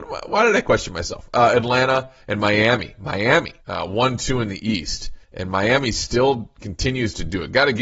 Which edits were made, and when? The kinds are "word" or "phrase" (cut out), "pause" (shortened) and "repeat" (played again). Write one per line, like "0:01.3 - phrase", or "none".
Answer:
0:02.2 - pause
0:03.6 - pause
0:05.2 - pause